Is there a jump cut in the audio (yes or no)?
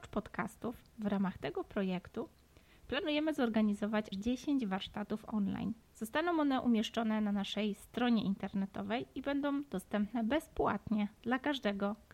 yes